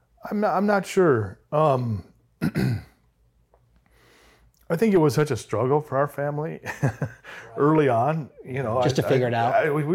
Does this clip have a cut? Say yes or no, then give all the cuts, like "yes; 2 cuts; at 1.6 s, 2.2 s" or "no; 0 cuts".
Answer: no; 0 cuts